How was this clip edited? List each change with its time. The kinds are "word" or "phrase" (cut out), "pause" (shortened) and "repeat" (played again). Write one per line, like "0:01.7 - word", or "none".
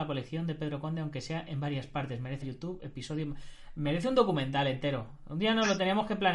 0:02.4 - phrase